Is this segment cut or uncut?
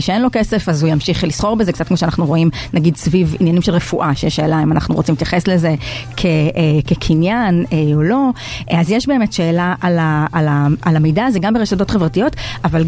uncut